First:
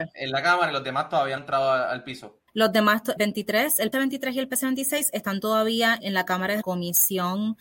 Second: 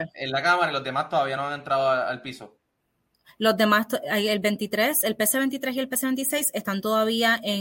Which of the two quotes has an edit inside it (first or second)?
first